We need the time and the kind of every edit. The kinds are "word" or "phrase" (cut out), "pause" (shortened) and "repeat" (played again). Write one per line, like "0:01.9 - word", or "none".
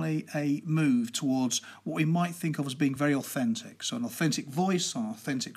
none